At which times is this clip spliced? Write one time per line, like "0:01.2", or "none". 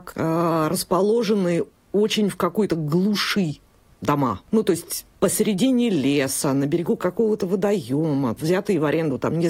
none